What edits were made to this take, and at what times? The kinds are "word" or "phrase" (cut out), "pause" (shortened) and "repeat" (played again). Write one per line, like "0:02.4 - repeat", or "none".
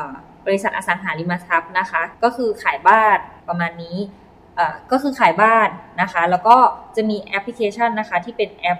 0:02.1 - pause
0:03.4 - pause

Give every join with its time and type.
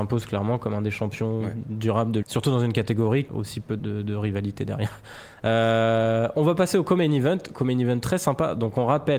0:02.2 - word
0:03.3 - word
0:03.8 - word

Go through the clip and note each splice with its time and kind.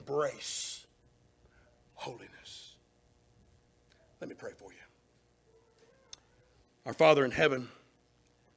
none

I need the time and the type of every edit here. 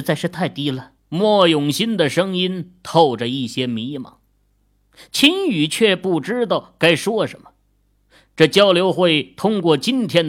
0:01.0 - pause

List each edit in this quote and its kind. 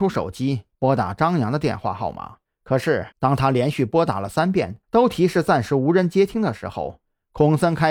0:02.5 - pause
0:03.1 - pause
0:04.8 - pause

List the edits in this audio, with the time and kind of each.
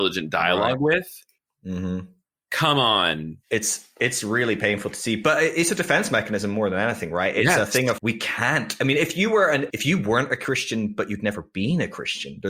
0:01.4 - pause
0:08.0 - word
0:09.7 - word

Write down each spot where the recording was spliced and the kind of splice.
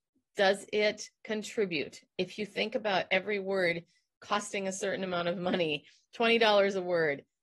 none

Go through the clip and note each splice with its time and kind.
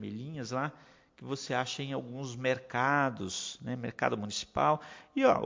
none

